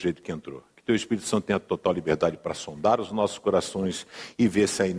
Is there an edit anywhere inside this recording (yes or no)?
no